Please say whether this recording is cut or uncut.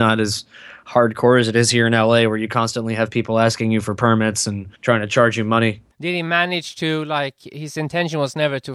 cut